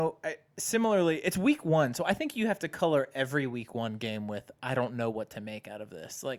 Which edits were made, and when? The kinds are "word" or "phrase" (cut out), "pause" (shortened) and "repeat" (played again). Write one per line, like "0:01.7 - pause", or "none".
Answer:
none